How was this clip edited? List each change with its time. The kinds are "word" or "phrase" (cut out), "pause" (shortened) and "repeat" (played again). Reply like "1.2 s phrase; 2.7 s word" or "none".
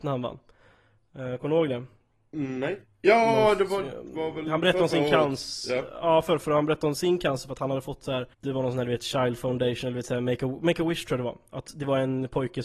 8.3 s pause